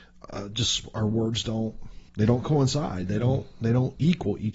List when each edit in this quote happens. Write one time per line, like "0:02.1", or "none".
0:02.1